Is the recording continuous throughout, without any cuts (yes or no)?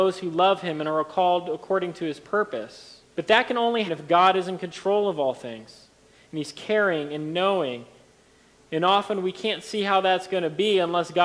no